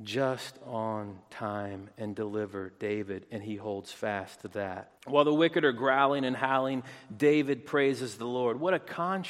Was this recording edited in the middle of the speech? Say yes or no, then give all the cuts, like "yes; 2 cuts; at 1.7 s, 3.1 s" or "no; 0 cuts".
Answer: yes; 1 cut; at 5.0 s